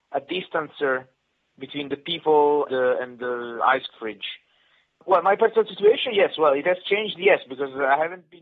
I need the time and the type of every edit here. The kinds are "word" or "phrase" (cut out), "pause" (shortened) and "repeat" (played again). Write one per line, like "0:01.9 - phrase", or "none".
0:02.7 - word
0:03.9 - word